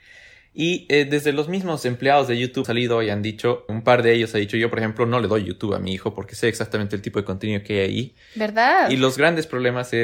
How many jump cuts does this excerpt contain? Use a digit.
2